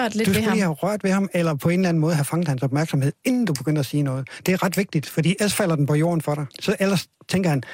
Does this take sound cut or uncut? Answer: cut